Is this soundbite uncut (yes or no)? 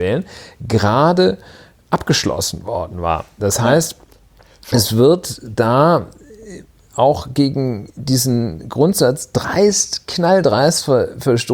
yes